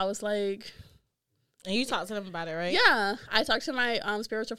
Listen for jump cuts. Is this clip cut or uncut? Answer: uncut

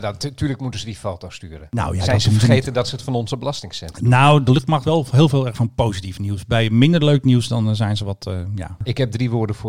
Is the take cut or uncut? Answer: cut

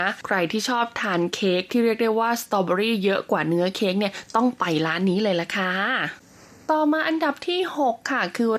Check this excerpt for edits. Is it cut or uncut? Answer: uncut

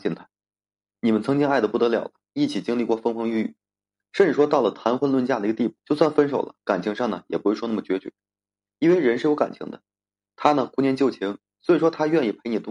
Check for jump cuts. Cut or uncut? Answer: cut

